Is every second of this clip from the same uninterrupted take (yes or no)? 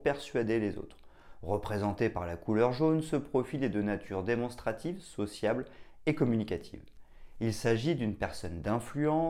yes